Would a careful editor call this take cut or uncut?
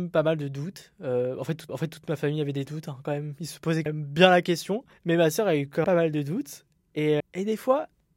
cut